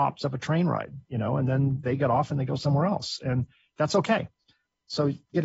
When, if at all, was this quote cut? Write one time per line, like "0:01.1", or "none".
none